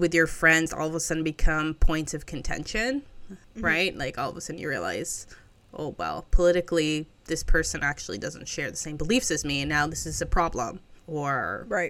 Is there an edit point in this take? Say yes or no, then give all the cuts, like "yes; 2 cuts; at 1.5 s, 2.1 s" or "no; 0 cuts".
no; 0 cuts